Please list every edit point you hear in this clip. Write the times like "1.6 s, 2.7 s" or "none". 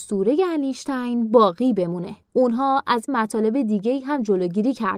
2.2 s, 3.1 s